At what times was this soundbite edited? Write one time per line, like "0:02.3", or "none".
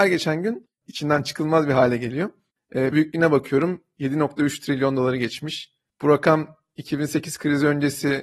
0:02.9